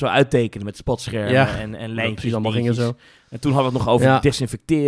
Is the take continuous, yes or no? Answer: yes